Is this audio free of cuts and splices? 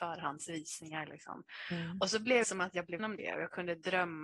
no; 2 cuts; at 2.4 s, 3.0 s

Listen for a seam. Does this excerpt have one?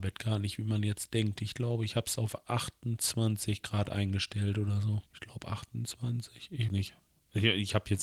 yes; 2 cuts; at 5.1 s, 6.7 s

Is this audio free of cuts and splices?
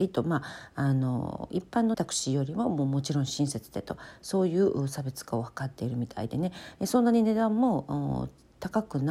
no; 1 cut; at 1.9 s

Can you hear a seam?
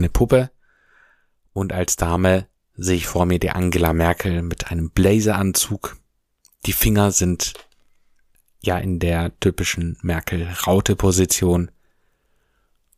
no; 0 cuts

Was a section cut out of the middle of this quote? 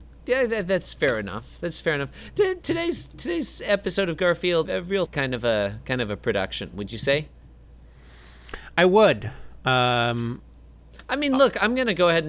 yes; 2 cuts; at 4.6 s, 5.1 s

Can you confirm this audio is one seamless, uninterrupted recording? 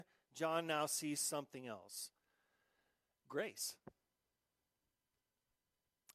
yes; 0 cuts

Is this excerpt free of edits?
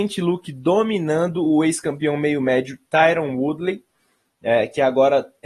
yes; 0 cuts

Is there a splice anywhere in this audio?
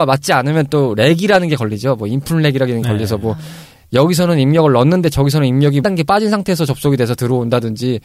yes; 1 cut; at 5.8 s

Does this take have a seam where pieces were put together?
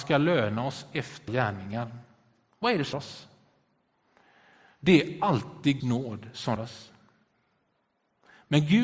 yes; 4 cuts; at 1.3 s, 2.9 s, 5.8 s, 6.6 s

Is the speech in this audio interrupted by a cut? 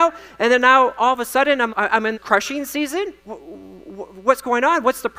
yes; 3 cuts; at 1.7 s, 2.1 s, 3.2 s

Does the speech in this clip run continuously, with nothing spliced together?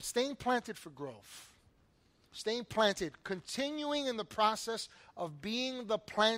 yes; 0 cuts

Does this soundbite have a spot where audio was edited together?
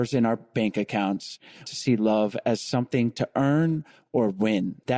yes; 1 cut; at 1.7 s

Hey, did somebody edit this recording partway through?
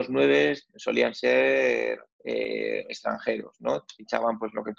yes; 1 cut; at 2.1 s

